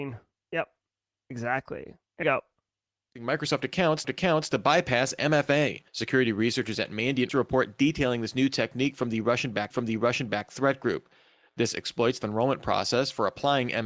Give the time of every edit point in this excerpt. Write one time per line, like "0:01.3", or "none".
0:02.2
0:04.0
0:05.9
0:07.3
0:09.7
0:12.2